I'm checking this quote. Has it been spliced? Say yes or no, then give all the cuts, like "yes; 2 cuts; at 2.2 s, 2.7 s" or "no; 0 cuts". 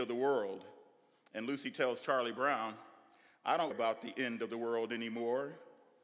yes; 1 cut; at 3.7 s